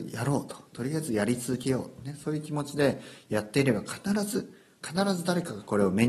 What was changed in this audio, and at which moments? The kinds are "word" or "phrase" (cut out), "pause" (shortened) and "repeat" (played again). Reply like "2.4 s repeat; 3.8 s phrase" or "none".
none